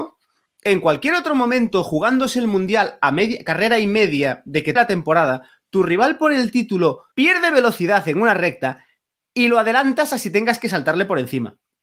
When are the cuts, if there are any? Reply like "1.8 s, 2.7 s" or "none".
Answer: 4.8 s, 7.1 s